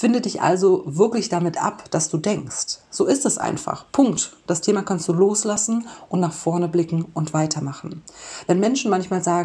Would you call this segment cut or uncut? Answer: uncut